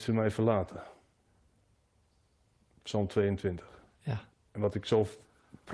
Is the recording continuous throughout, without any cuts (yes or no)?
yes